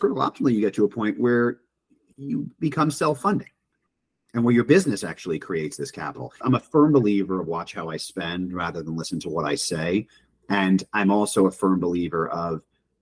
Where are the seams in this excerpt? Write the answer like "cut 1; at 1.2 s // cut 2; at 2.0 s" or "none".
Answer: none